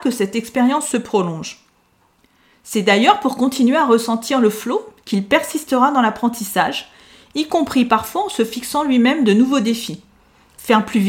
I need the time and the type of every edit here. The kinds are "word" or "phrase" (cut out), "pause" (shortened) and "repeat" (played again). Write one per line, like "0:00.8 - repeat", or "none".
none